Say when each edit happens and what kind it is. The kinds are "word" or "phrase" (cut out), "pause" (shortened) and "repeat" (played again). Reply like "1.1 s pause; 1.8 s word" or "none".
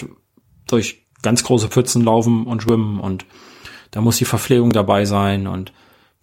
none